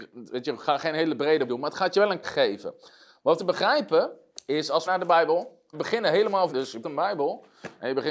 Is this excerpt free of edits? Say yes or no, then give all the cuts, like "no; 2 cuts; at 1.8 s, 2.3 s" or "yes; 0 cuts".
no; 7 cuts; at 1.5 s, 2.2 s, 3.4 s, 4.9 s, 5.7 s, 6.5 s, 6.8 s